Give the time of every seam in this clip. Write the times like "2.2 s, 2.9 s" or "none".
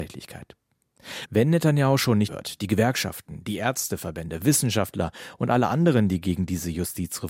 2.3 s